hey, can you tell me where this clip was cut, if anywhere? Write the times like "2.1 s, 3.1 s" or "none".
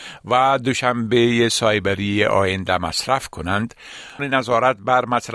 4.2 s